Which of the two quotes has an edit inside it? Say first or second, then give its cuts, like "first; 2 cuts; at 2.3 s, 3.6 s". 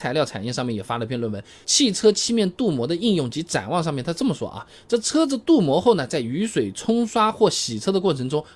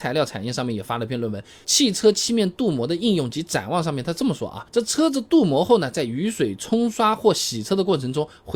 second; 1 cut; at 4.7 s